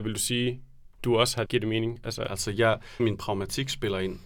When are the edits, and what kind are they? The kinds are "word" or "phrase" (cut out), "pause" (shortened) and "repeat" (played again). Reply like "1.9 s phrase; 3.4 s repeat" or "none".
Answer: 1.0 s word; 1.5 s word; 2.3 s word; 3.0 s word